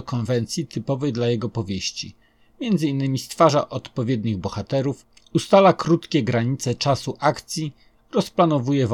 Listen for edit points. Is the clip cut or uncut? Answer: uncut